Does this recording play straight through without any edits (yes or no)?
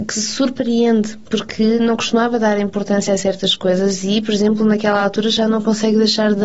yes